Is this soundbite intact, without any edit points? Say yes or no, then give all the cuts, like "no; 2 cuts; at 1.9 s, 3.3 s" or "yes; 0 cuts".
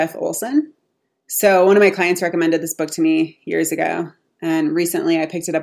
yes; 0 cuts